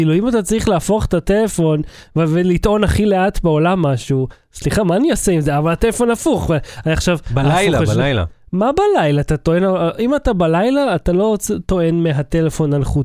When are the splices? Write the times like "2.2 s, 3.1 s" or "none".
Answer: none